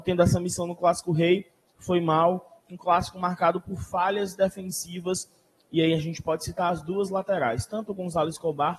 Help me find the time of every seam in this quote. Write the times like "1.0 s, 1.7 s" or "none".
none